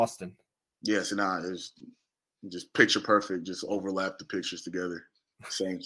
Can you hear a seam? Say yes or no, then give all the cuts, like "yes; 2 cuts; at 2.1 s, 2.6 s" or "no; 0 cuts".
no; 0 cuts